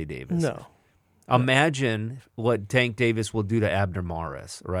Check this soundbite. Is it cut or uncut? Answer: uncut